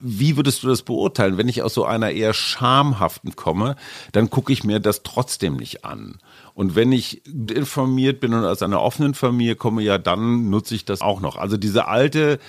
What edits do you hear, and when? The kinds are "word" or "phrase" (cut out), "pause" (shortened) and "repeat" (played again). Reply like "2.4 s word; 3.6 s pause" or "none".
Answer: 3.3 s word; 7.5 s word; 11.0 s word

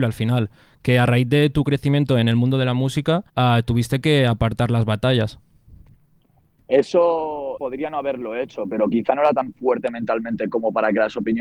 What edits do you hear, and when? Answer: 3.3 s pause; 7.6 s word

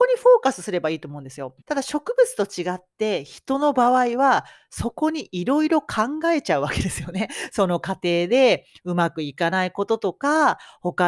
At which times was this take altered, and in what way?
1.6 s pause

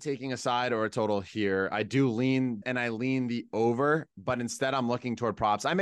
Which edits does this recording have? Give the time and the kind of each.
2.6 s word; 4.1 s word

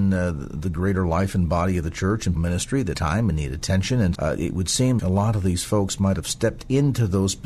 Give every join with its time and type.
2.3 s word; 2.9 s word; 4.1 s word; 5.0 s word

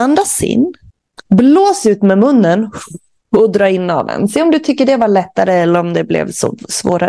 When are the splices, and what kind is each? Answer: 0.9 s pause; 3.2 s pause

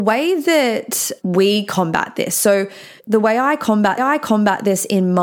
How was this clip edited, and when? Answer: 1.2 s word; 3.0 s pause; 4.0 s repeat

